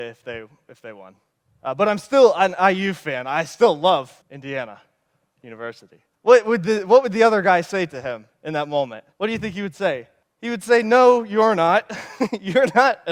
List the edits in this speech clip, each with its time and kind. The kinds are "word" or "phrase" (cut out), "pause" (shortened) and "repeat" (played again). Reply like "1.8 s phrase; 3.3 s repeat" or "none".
1.3 s pause; 4.2 s pause; 6.1 s pause; 8.3 s pause; 9.1 s pause; 10.2 s pause

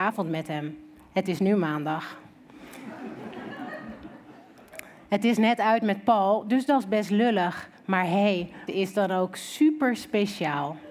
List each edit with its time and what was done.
8.7 s word

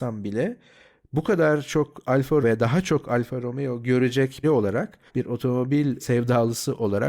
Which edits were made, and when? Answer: 2.4 s word; 4.4 s word; 5.1 s pause; 6.0 s word

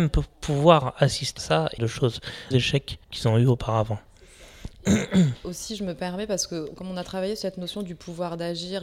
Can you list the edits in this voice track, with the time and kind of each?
1.4 s word; 1.8 s phrase; 2.5 s phrase; 3.0 s pause

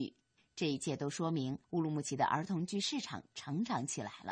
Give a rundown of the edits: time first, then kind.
1.6 s pause

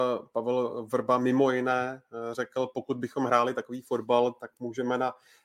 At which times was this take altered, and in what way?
none

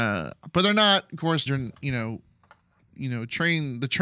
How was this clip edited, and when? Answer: 1.5 s word; 2.9 s word

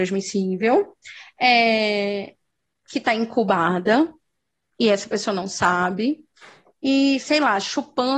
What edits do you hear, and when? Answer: none

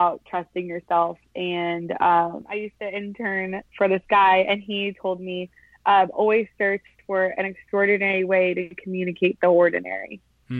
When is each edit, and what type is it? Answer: none

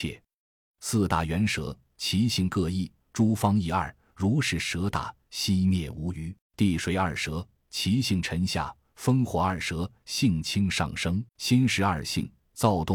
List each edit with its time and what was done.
3.0 s phrase; 6.4 s pause; 11.3 s pause

